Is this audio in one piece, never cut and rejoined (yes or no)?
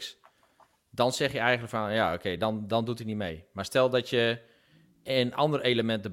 yes